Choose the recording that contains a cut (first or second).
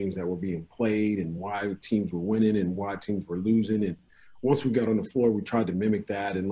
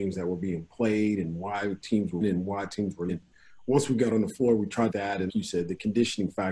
second